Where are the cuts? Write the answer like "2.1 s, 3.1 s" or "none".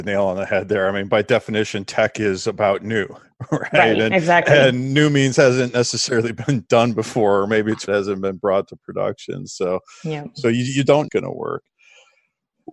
7.9 s, 11.1 s